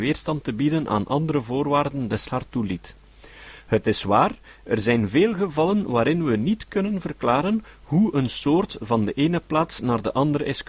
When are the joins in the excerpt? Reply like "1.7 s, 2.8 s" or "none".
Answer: 2.3 s